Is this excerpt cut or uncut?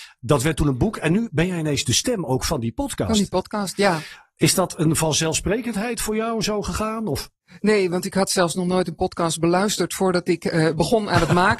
uncut